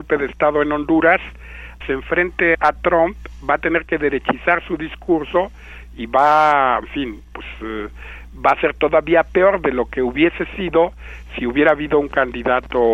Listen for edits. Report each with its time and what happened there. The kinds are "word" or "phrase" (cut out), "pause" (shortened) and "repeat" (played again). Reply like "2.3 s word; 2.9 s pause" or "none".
1.8 s phrase; 2.5 s word; 6.8 s word